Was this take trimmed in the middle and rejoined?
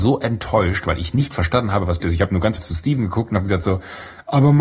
yes; 2 cuts; at 2.0 s, 2.6 s

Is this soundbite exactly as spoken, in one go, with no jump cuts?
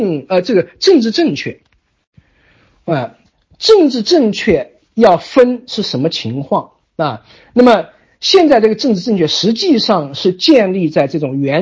yes; 0 cuts

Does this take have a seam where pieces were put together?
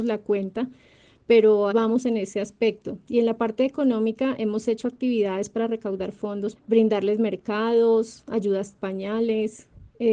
yes; 3 cuts; at 1.7 s, 6.5 s, 8.7 s

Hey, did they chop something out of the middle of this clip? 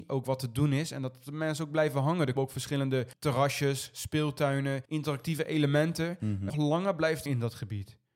yes; 5 cuts; at 2.4 s, 3.1 s, 4.8 s, 6.5 s, 7.3 s

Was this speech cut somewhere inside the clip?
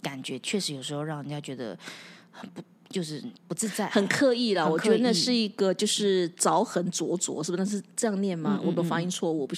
no; 0 cuts

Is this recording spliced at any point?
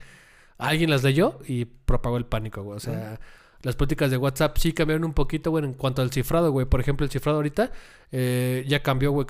no; 0 cuts

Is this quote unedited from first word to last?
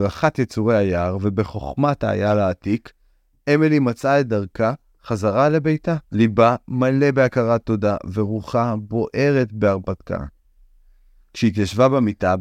no; 1 cut; at 6.0 s

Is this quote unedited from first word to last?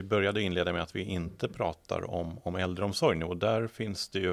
yes; 0 cuts

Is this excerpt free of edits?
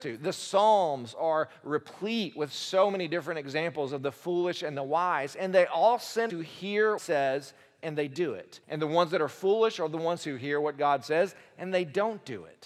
no; 3 cuts; at 6.3 s, 7.0 s, 8.6 s

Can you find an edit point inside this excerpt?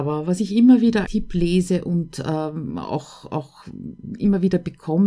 yes; 1 cut; at 1.0 s

